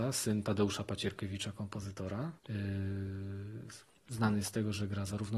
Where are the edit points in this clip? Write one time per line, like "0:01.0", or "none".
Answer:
0:02.4